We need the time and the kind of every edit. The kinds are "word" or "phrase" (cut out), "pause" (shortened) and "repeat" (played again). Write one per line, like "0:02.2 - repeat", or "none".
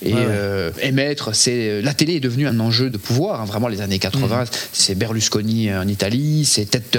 0:02.5 - word

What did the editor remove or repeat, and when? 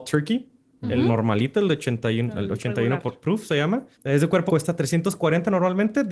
0:03.9 - pause
0:04.5 - word

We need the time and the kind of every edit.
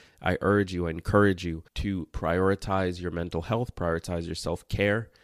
0:01.7 - pause

